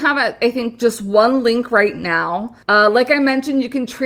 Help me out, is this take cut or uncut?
cut